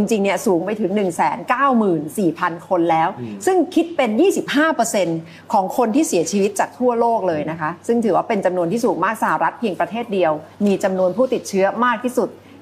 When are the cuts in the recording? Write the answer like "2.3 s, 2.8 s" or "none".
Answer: 10.5 s